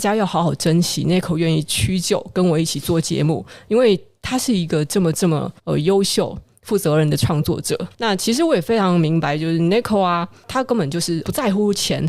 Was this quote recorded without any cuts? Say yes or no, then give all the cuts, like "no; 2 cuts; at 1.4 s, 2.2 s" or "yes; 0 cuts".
no; 2 cuts; at 5.6 s, 7.9 s